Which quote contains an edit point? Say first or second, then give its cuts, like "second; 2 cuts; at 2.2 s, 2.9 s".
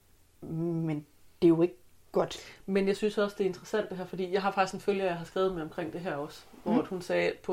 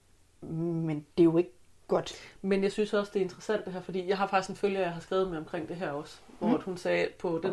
second; 1 cut; at 1.1 s